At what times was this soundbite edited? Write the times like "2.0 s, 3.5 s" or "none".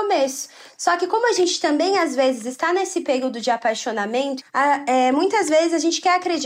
4.4 s